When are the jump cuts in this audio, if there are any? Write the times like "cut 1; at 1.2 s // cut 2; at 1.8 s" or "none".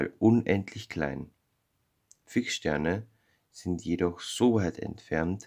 none

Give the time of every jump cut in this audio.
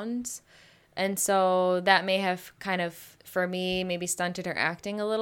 cut 1; at 3.1 s

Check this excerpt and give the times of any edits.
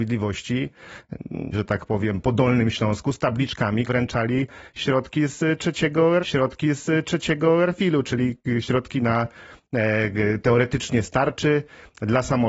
cut 1; at 1.5 s // cut 2; at 2.2 s // cut 3; at 3.9 s // cut 4; at 6.2 s

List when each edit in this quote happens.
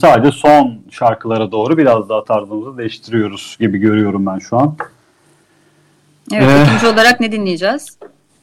none

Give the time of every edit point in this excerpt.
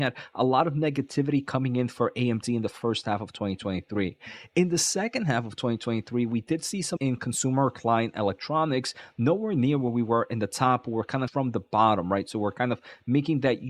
cut 1; at 7.0 s // cut 2; at 11.3 s

